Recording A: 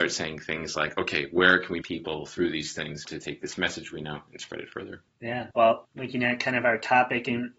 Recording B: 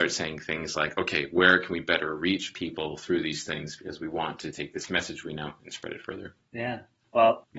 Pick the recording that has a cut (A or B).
A